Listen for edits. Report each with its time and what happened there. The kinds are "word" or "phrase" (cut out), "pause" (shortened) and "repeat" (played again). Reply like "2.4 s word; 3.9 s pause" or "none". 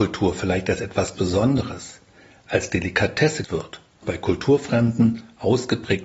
1.1 s word; 3.4 s word; 4.0 s word